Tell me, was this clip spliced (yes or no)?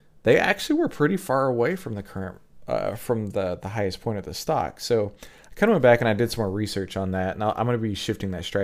no